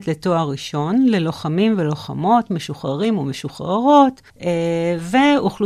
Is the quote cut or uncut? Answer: cut